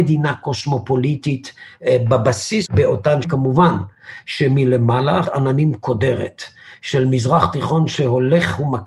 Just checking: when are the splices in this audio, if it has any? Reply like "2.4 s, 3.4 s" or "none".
2.7 s, 3.2 s, 5.2 s